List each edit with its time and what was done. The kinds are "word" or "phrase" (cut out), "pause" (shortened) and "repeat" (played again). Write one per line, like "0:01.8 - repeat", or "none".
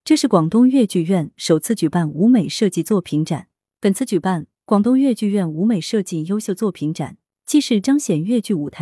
none